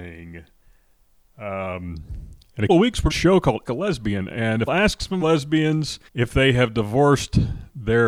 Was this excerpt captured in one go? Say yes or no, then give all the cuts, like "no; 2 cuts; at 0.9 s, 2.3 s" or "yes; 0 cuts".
no; 6 cuts; at 2.7 s, 3.1 s, 3.6 s, 4.7 s, 5.2 s, 6.1 s